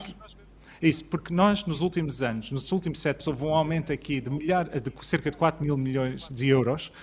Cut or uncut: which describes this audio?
cut